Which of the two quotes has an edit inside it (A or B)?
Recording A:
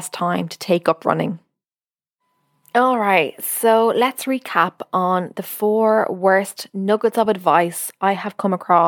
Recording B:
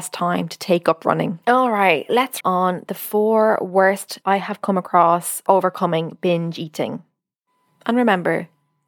B